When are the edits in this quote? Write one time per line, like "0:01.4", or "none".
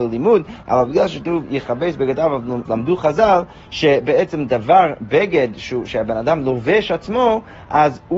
0:02.7